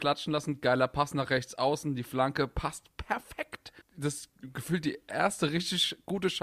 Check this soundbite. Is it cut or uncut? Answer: cut